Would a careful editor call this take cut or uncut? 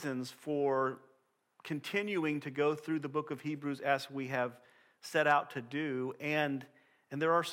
uncut